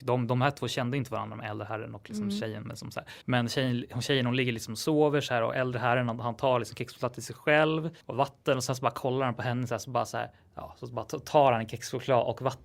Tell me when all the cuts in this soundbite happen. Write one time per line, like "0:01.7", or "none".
0:03.2
0:08.0